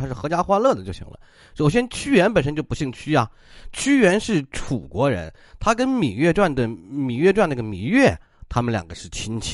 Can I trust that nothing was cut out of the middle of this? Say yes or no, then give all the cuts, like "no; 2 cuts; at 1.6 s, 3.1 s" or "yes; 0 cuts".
yes; 0 cuts